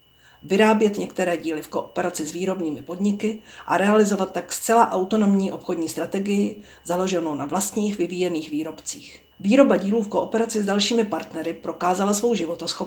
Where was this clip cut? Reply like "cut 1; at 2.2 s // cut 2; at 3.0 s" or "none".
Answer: cut 1; at 9.3 s